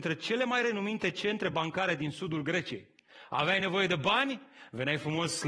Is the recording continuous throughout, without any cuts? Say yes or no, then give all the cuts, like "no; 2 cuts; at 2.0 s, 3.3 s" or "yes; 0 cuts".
yes; 0 cuts